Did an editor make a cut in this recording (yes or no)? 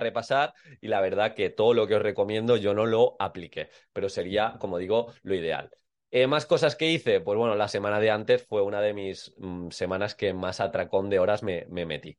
no